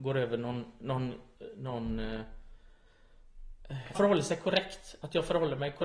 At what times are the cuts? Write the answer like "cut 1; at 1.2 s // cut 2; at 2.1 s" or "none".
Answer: cut 1; at 3.9 s